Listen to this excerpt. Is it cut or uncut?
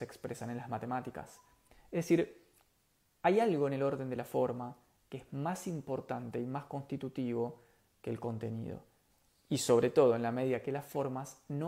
uncut